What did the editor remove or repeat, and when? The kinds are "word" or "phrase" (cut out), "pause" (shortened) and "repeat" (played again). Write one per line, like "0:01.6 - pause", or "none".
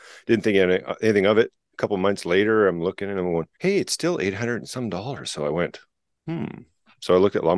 0:03.5 - pause